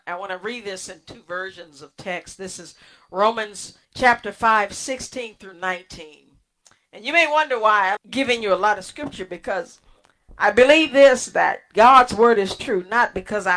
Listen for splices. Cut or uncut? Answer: cut